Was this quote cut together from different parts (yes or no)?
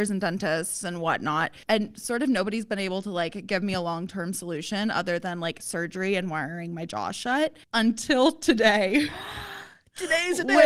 yes